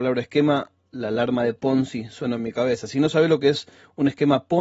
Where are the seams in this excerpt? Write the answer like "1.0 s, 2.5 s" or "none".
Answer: none